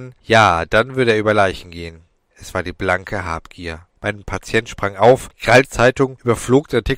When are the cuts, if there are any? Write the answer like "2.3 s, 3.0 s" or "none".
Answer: 4.0 s, 5.6 s